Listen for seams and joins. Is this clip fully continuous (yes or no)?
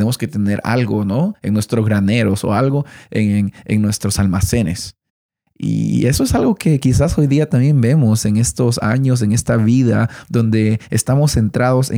yes